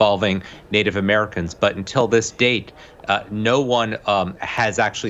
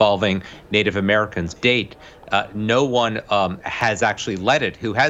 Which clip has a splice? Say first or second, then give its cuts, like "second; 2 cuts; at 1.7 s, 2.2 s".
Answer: second; 1 cut; at 1.6 s